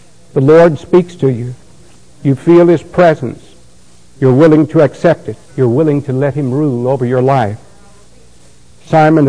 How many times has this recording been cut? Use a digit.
1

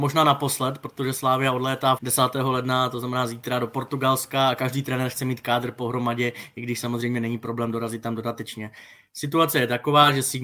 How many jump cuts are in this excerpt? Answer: 1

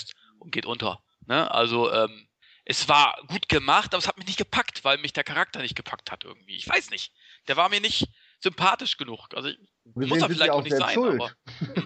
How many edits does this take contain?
1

